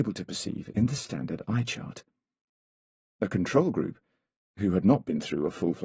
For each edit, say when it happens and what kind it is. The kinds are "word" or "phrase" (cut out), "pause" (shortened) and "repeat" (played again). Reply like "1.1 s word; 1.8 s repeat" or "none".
none